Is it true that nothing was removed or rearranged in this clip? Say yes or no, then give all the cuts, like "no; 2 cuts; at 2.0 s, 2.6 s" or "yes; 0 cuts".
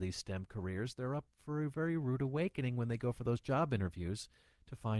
yes; 0 cuts